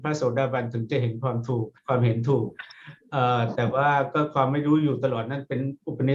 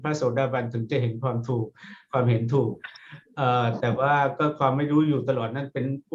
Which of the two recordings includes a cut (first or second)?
first